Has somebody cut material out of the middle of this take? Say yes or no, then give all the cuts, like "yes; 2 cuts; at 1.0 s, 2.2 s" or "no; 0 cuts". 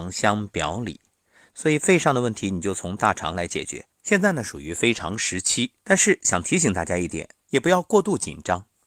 yes; 3 cuts; at 3.9 s, 5.8 s, 7.4 s